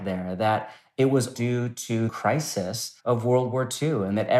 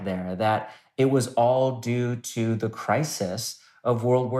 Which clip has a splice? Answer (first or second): first